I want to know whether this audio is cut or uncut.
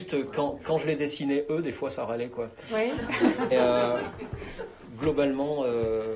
cut